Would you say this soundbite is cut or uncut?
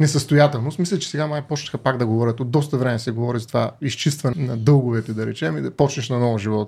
cut